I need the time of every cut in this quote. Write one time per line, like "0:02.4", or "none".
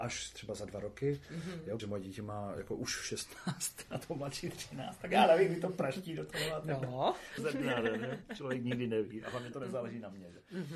0:01.8
0:07.4